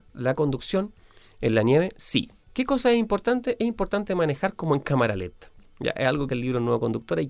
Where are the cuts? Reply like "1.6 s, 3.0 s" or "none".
2.4 s, 6.3 s